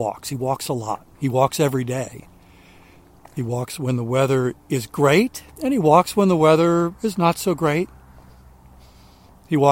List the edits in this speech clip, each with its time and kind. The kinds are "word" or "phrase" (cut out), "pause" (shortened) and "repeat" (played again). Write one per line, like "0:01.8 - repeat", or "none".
0:01.1 - pause
0:05.5 - pause